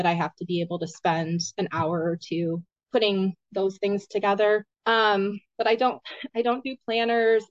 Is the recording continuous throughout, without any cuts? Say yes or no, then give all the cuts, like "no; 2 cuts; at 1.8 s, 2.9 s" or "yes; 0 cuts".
no; 2 cuts; at 2.7 s, 4.7 s